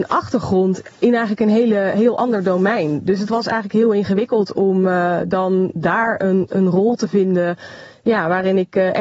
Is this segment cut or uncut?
uncut